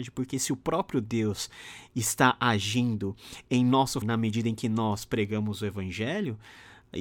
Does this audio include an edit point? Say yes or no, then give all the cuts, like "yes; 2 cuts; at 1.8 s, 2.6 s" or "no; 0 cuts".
yes; 1 cut; at 4.0 s